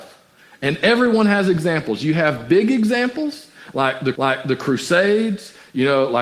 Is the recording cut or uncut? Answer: cut